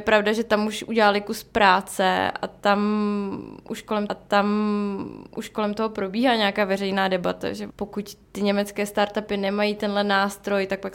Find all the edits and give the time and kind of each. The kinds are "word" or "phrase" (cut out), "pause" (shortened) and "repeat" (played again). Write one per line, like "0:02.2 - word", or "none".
0:04.1 - repeat
0:08.2 - pause